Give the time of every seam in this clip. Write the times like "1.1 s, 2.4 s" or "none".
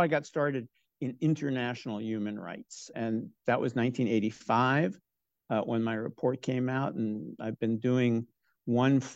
2.9 s